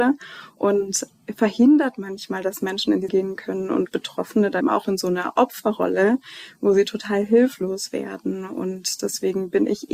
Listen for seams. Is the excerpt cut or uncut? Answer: cut